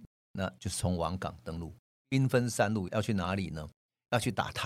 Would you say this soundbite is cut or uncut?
uncut